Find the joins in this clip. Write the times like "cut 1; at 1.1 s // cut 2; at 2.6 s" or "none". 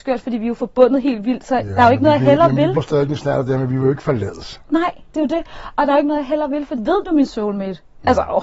cut 1; at 2.8 s // cut 2; at 6.8 s